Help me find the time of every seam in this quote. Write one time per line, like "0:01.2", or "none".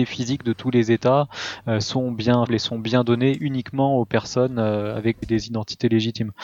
0:02.5
0:05.2